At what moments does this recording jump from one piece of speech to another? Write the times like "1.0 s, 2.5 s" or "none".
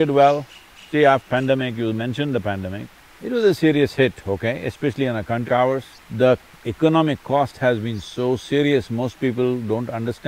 1.3 s, 3.0 s, 5.5 s, 6.0 s